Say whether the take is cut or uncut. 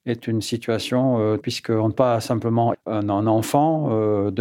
cut